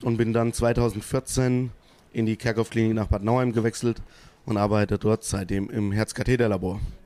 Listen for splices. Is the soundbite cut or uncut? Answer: uncut